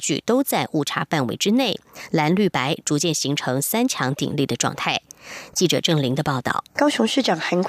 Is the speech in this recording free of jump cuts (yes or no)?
no